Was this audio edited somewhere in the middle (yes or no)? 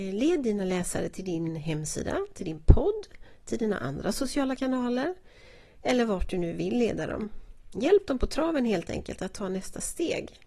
no